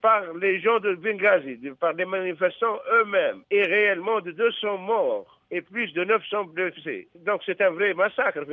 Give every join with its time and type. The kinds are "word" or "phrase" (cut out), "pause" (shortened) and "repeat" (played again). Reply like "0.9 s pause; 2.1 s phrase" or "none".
3.4 s pause; 5.4 s pause; 7.1 s pause